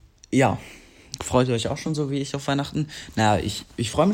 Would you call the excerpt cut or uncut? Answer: uncut